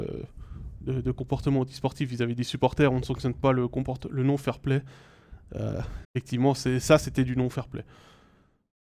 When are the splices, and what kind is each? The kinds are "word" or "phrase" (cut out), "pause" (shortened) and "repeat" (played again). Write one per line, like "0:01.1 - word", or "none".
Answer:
0:06.0 - pause